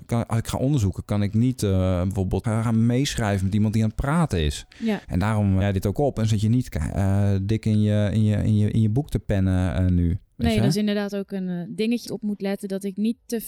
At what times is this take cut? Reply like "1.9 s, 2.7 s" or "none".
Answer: 2.4 s, 5.0 s, 5.6 s, 12.1 s